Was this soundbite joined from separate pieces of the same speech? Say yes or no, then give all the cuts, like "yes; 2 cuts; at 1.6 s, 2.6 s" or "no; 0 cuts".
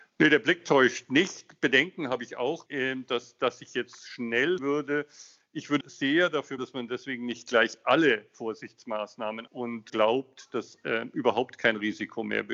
yes; 6 cuts; at 2.7 s, 4.6 s, 5.8 s, 6.6 s, 9.5 s, 9.9 s